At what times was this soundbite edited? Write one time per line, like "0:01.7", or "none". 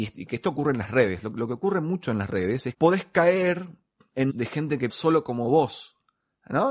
0:02.7
0:04.3
0:04.9

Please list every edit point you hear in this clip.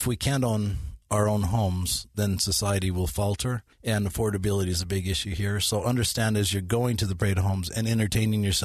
0:01.0
0:03.7

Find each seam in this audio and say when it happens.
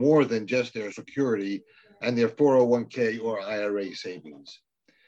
0:00.9

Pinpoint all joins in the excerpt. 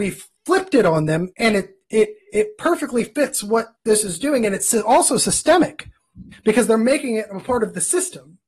0:01.3
0:03.7
0:06.3

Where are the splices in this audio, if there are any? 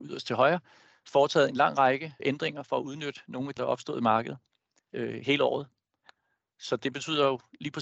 0:02.2
0:03.6
0:04.9

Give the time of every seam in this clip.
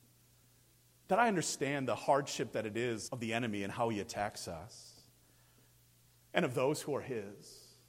0:03.1

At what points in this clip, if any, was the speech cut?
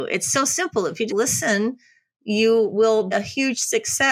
0:01.1
0:03.1

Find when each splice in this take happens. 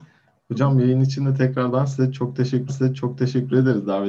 0:02.7

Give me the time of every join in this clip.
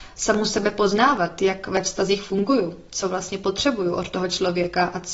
none

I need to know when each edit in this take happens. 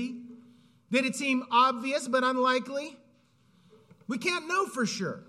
none

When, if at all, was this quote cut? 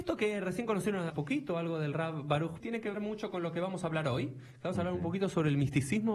0:01.1
0:02.6
0:02.9

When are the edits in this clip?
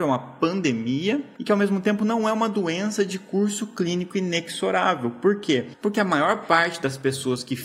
none

